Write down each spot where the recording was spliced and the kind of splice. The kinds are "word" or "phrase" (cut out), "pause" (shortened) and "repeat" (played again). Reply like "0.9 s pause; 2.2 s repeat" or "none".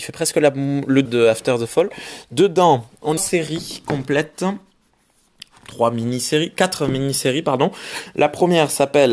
1.0 s word; 3.2 s phrase